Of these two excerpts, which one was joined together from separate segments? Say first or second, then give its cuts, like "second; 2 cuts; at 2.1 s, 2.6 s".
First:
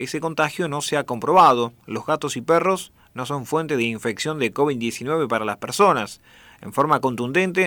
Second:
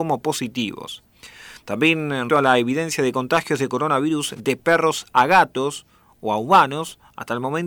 second; 1 cut; at 2.3 s